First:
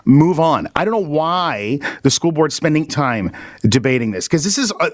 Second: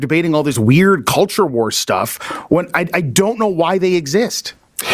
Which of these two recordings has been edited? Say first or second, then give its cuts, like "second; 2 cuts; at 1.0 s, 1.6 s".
first; 1 cut; at 2.9 s